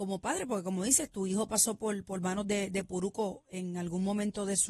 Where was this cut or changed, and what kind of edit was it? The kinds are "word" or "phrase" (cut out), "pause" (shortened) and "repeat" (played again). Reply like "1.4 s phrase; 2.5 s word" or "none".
none